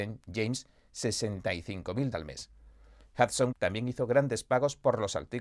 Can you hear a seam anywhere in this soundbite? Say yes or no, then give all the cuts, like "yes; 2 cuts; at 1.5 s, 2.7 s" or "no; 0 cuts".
yes; 2 cuts; at 2.1 s, 3.5 s